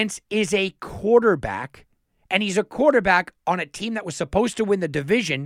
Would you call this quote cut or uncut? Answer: uncut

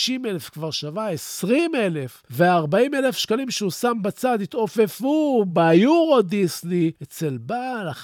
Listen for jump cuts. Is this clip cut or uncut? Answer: uncut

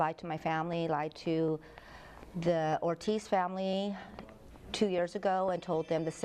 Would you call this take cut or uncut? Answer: uncut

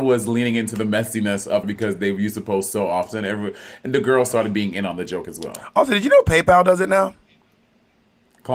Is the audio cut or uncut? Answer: cut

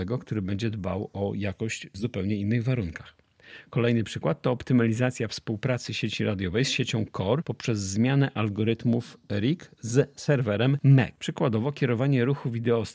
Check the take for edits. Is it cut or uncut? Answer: uncut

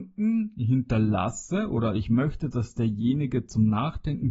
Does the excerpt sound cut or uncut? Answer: uncut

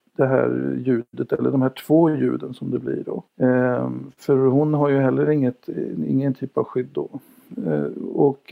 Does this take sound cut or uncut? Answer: cut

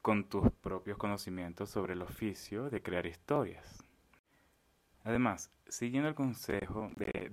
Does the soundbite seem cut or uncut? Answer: uncut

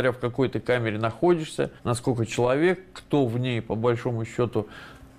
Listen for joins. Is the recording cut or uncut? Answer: cut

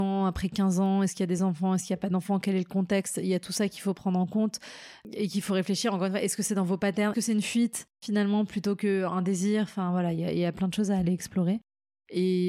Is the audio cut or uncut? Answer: cut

